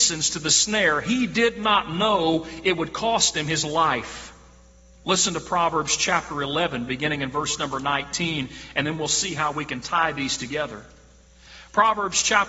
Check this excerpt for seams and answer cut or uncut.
uncut